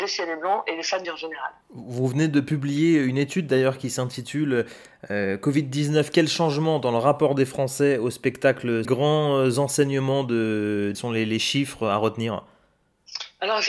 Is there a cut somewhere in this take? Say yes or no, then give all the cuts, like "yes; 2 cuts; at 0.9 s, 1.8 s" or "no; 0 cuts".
yes; 4 cuts; at 1.0 s, 1.6 s, 8.8 s, 10.9 s